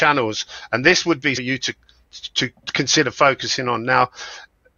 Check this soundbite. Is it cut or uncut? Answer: cut